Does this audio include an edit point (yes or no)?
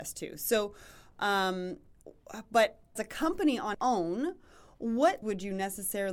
yes